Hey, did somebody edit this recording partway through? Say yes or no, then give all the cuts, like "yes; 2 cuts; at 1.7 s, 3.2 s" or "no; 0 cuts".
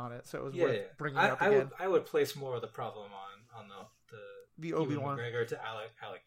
yes; 1 cut; at 4.5 s